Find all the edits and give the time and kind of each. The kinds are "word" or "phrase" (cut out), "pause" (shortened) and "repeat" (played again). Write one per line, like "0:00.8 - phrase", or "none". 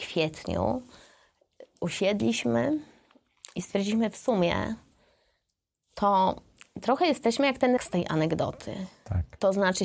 0:07.8 - word